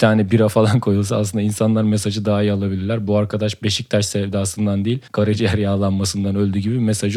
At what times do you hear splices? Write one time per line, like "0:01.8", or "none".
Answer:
0:05.1